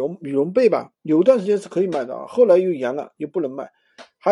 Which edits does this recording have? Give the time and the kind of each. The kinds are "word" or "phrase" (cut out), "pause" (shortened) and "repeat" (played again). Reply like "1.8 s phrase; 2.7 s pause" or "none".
1.0 s pause